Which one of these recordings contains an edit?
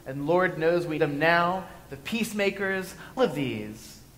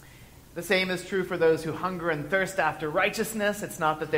first; 2 cuts; at 1.0 s, 3.2 s

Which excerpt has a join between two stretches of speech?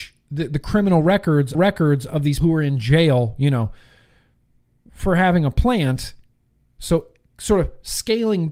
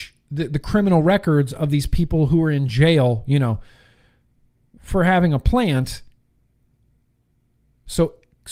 first; 3 cuts; at 1.5 s, 2.4 s, 6.4 s

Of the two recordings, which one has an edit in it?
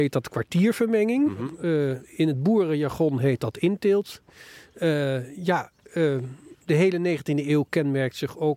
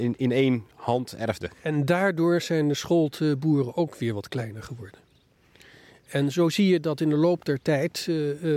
first; 1 cut; at 6.6 s

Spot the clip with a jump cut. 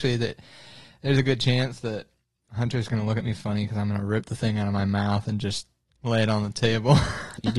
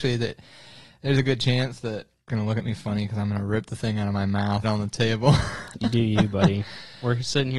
second; 2 cuts; at 2.3 s, 4.6 s

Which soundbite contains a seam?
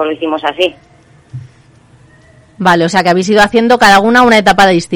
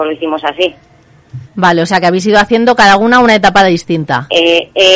second; 1 cut; at 1.5 s

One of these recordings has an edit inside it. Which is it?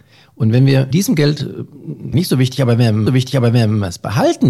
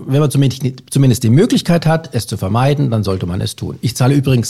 first; 3 cuts; at 0.9 s, 2.1 s, 3.1 s

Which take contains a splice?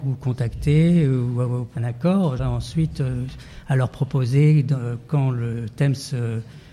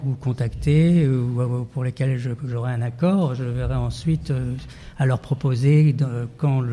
first; 2 cuts; at 1.8 s, 2.4 s

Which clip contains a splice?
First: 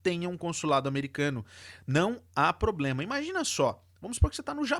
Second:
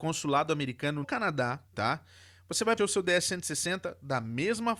second; 3 cuts; at 1.0 s, 1.7 s, 2.8 s

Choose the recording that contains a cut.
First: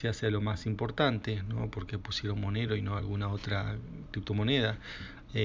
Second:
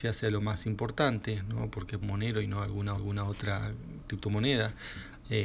second; 2 cuts; at 2.0 s, 2.9 s

